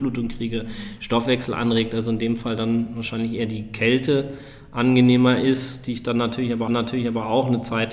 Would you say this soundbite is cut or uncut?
cut